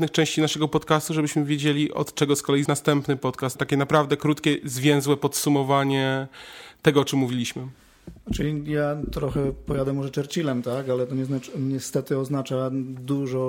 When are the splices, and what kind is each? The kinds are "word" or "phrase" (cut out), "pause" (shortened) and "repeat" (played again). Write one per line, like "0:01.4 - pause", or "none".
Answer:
0:02.7 - word
0:03.6 - word
0:08.2 - pause